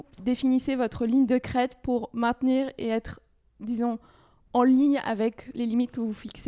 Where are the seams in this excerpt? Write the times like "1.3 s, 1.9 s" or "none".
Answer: none